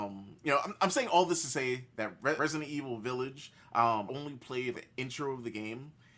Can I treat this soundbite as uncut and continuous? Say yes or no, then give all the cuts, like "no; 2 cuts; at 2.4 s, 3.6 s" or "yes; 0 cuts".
no; 3 cuts; at 2.4 s, 4.1 s, 4.7 s